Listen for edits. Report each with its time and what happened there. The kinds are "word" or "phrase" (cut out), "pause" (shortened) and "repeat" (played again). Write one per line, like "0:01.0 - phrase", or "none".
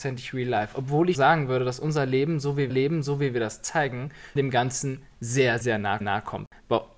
0:01.1 - word
0:02.7 - repeat
0:04.4 - word
0:05.6 - word
0:06.0 - repeat